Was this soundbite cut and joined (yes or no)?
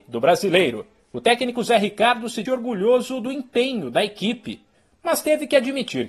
yes